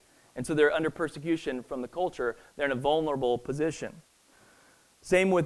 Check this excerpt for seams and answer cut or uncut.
uncut